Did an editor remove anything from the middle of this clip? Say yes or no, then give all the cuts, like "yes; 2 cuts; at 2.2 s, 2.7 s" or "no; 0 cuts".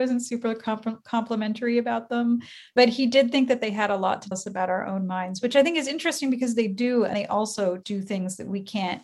yes; 3 cuts; at 4.3 s, 7.1 s, 7.8 s